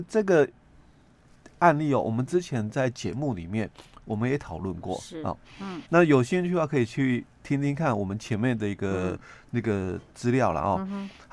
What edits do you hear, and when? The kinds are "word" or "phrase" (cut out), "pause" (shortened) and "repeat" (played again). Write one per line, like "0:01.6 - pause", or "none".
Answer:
0:05.9 - pause